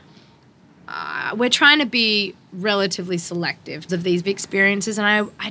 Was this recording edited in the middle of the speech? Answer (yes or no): yes